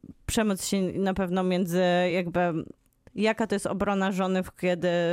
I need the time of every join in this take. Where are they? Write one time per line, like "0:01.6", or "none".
none

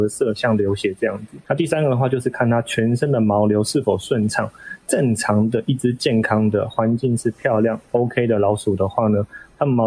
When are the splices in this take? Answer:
none

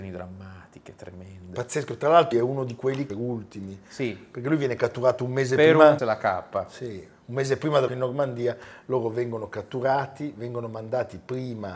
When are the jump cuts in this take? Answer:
0:02.3
0:03.1
0:06.0
0:07.9

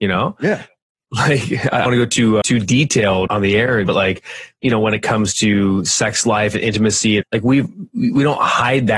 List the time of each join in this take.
0:01.9
0:02.4
0:03.3
0:03.8
0:07.2

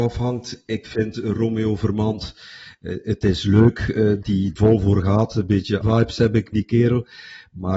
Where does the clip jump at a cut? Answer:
0:04.2
0:04.6
0:05.8
0:06.5

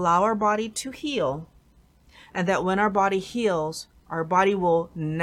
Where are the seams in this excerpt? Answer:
none

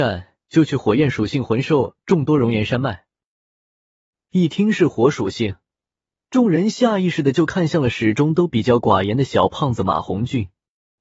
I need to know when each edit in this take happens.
none

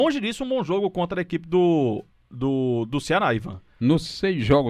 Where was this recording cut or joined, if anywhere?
none

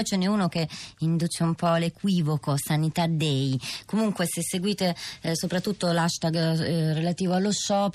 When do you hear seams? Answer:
none

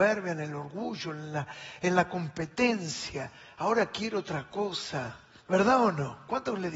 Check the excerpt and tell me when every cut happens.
none

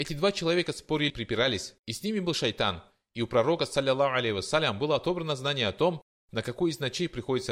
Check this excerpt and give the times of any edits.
0:01.1
0:01.8

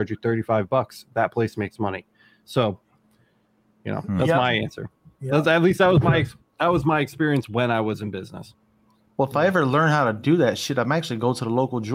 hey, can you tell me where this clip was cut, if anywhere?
none

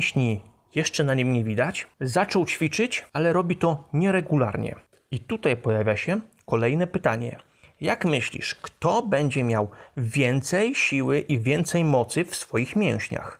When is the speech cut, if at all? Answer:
none

